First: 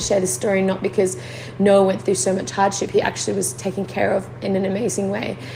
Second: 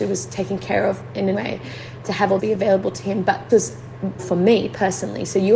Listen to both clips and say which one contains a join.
second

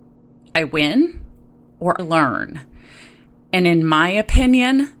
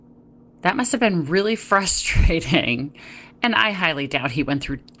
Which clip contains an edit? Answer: first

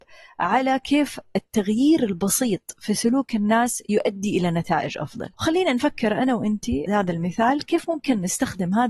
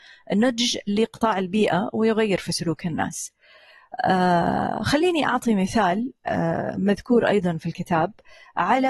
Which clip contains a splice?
first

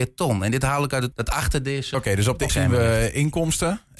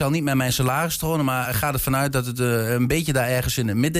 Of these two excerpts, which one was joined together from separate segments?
first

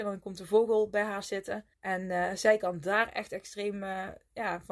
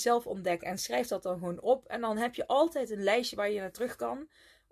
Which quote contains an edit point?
first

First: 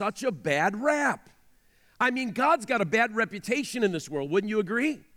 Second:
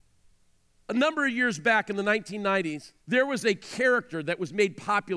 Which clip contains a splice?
second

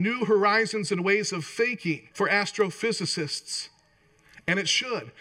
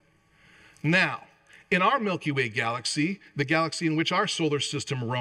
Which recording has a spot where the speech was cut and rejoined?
first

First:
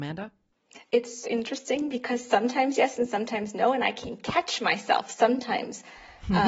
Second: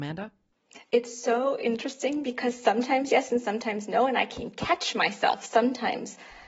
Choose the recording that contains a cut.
first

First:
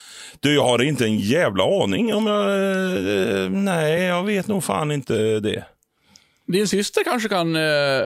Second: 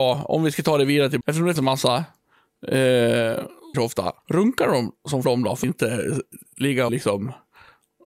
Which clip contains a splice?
second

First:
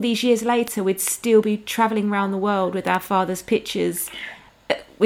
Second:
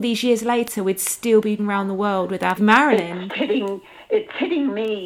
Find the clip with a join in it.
second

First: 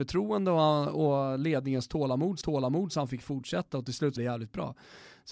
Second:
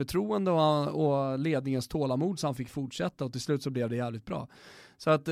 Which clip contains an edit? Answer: first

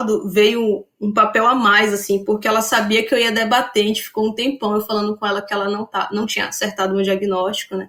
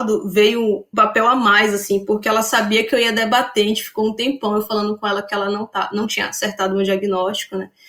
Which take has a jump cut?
second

